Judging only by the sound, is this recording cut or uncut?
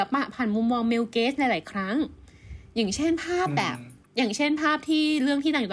cut